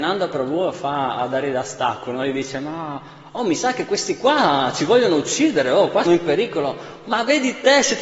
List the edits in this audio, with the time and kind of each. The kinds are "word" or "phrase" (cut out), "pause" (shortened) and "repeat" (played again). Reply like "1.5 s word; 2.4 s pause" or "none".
6.0 s word